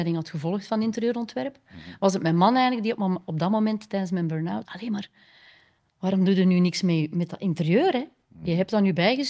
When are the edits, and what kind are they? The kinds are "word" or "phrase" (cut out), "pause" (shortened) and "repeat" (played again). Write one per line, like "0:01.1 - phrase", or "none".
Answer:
0:04.6 - phrase